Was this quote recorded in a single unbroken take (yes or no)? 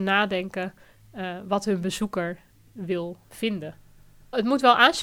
yes